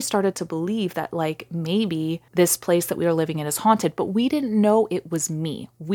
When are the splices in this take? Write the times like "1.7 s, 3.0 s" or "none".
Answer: 2.3 s